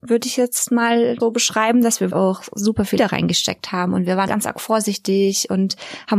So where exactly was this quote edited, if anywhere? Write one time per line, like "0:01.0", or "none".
0:01.2
0:02.1
0:03.0
0:04.3